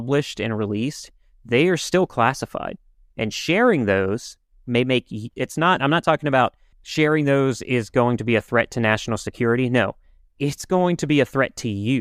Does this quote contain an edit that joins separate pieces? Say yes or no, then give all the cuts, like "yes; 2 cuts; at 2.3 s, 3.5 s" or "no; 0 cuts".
no; 0 cuts